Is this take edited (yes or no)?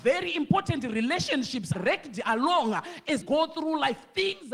yes